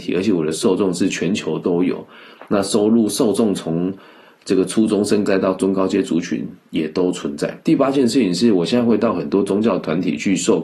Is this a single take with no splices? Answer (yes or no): no